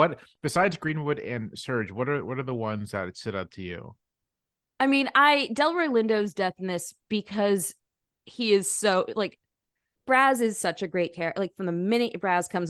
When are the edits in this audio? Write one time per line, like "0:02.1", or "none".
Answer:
none